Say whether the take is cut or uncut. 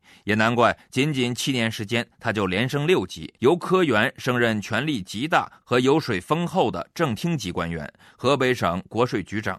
cut